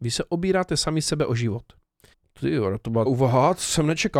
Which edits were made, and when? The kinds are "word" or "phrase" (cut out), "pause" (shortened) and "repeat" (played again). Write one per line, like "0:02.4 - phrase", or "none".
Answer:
0:02.1 - pause
0:03.1 - phrase